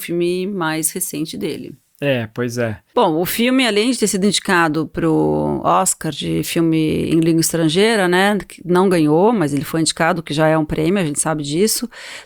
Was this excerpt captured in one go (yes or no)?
no